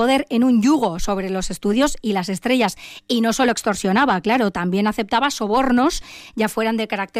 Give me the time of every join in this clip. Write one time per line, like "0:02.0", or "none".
none

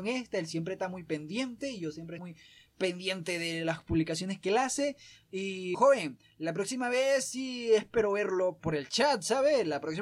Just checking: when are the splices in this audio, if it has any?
0:02.2
0:05.7
0:08.6

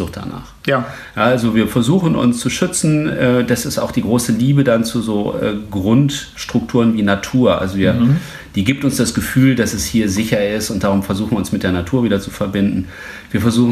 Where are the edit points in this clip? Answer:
none

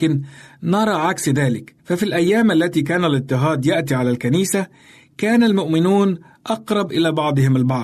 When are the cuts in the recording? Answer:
none

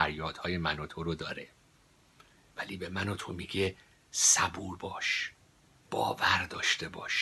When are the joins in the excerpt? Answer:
none

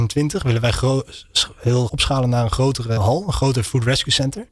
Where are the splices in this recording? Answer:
0:01.9
0:03.0

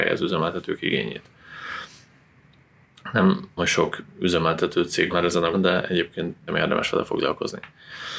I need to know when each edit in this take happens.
0:03.6
0:05.1
0:05.5
0:06.5

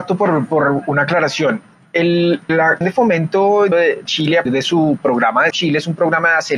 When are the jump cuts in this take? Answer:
0:02.5
0:02.8
0:03.7
0:04.1
0:04.5
0:05.5

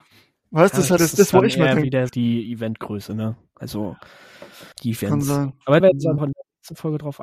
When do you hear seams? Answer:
0:01.0
0:02.1
0:04.7
0:05.8
0:06.2

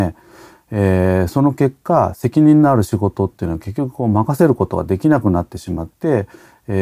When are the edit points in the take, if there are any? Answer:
none

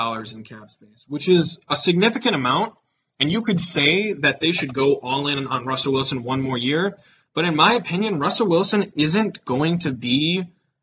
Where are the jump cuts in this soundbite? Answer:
none

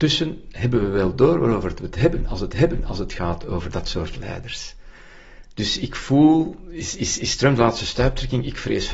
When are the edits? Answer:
0:02.5
0:07.2

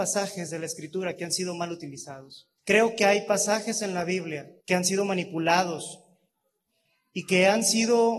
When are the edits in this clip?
0:02.6
0:04.6

